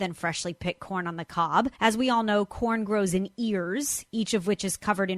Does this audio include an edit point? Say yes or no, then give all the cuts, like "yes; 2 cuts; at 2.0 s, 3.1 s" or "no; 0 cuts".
yes; 1 cut; at 1.8 s